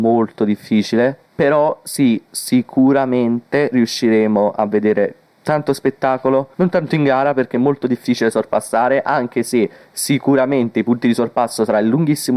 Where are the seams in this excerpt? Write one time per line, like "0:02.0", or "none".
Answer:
0:01.3
0:06.5